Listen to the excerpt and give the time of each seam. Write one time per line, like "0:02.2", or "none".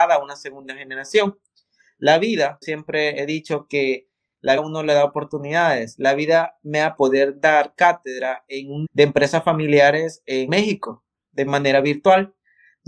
0:02.6
0:04.6
0:07.0
0:08.8
0:10.5